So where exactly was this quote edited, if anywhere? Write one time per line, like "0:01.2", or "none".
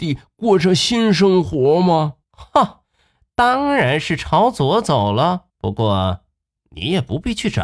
0:02.2
0:05.5